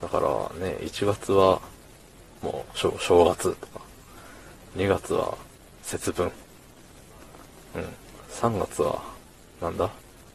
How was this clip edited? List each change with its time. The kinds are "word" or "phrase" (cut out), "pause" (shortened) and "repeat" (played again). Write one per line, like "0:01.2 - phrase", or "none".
0:05.6 - pause